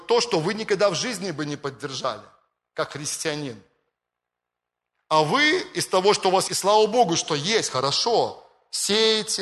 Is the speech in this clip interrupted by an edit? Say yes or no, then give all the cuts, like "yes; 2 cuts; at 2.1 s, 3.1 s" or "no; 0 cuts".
yes; 1 cut; at 6.5 s